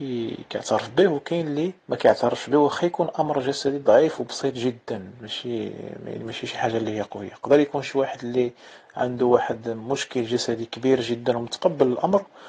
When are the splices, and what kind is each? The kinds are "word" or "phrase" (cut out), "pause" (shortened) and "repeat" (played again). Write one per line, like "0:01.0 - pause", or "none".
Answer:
0:01.8 - pause